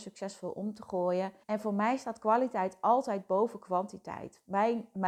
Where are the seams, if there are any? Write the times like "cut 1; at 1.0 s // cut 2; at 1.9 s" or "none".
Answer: cut 1; at 1.4 s